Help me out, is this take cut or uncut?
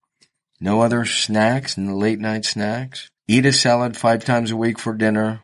cut